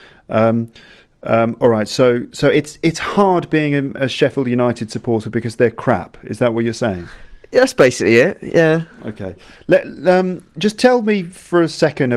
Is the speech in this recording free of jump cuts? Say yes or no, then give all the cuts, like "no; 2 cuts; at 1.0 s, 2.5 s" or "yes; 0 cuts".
yes; 0 cuts